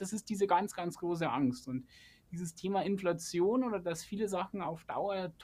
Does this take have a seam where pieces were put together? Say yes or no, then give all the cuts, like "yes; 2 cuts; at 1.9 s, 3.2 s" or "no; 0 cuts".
no; 0 cuts